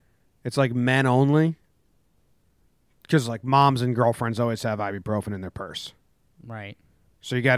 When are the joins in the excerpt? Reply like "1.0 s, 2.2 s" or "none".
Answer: none